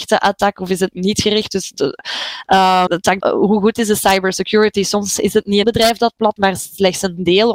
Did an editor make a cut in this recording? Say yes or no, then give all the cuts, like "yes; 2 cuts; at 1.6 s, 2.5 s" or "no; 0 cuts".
yes; 4 cuts; at 2.9 s, 3.2 s, 5.6 s, 6.4 s